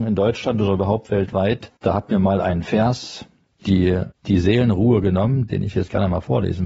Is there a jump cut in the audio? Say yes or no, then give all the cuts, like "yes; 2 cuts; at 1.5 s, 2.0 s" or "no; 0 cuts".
yes; 3 cuts; at 1.8 s, 3.6 s, 5.7 s